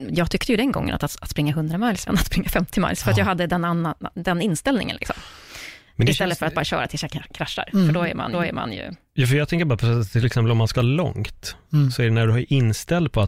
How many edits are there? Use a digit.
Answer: 3